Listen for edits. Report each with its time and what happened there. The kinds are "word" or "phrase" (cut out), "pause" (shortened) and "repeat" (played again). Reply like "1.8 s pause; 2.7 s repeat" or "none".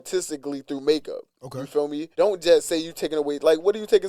2.1 s pause